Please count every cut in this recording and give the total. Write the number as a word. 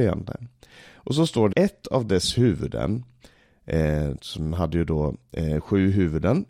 one